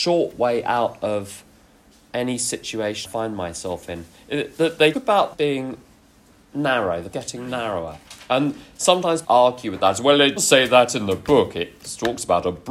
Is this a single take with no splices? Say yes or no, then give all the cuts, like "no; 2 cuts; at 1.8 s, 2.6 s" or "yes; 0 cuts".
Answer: no; 6 cuts; at 3.0 s, 4.9 s, 5.3 s, 7.1 s, 9.2 s, 10.4 s